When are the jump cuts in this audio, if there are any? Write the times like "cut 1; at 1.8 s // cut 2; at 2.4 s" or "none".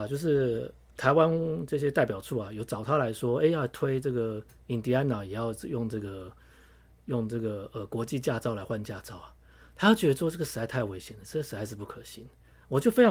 none